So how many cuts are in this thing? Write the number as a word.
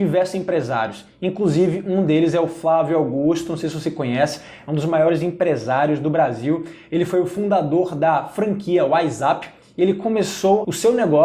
zero